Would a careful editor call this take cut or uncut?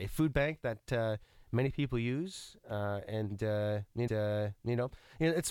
cut